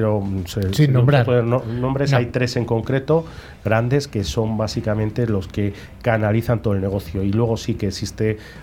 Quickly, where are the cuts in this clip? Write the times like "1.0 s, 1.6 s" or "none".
none